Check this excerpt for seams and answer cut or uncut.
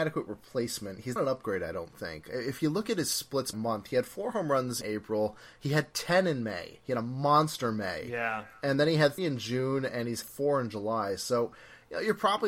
cut